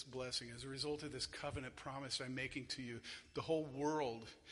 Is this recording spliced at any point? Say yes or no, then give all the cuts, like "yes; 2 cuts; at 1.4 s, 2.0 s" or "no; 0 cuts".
no; 0 cuts